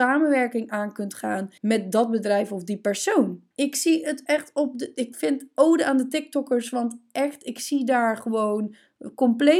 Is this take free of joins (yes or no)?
no